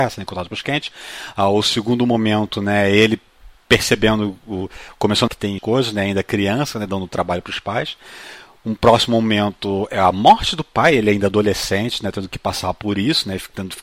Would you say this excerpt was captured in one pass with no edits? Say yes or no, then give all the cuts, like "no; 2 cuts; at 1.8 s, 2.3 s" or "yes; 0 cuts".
no; 2 cuts; at 5.3 s, 5.6 s